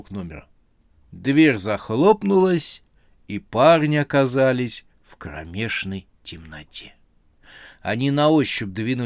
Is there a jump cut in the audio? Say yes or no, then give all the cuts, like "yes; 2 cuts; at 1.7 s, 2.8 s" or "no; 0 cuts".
no; 0 cuts